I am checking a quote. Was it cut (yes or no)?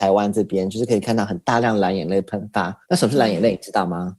yes